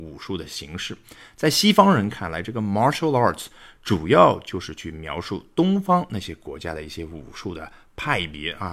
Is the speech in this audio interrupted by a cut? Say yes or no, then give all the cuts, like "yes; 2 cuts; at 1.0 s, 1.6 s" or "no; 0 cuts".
no; 0 cuts